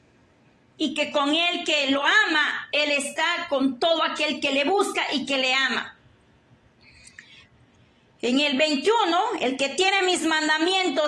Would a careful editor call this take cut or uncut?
uncut